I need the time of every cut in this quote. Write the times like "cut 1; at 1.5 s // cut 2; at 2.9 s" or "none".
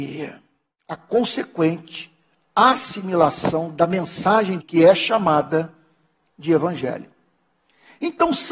cut 1; at 4.6 s